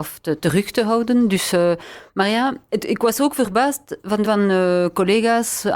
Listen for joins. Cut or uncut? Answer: cut